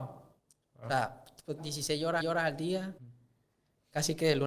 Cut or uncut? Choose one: cut